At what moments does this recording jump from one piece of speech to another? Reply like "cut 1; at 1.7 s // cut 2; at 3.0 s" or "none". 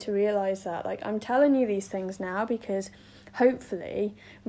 none